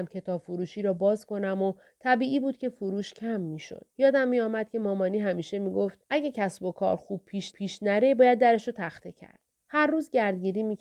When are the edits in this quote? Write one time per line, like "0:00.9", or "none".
0:03.9
0:06.0
0:07.5
0:09.6